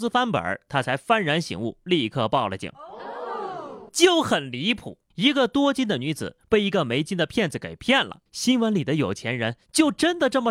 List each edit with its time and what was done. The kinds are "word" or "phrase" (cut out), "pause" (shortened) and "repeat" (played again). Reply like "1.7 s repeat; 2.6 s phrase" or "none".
3.9 s pause; 5.1 s pause; 8.3 s pause